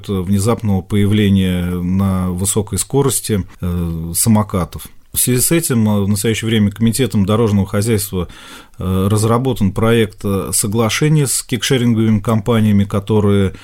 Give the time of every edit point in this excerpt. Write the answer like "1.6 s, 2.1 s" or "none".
5.0 s